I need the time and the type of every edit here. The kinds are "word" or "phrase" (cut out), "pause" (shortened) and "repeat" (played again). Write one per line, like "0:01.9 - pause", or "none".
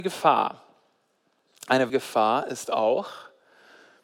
0:01.9 - word